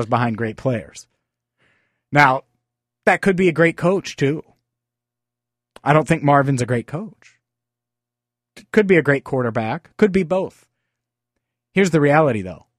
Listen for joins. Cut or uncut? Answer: uncut